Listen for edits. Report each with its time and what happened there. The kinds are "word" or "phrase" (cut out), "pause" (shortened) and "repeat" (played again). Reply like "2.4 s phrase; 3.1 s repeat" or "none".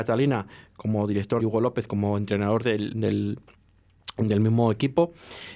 1.4 s word; 2.9 s word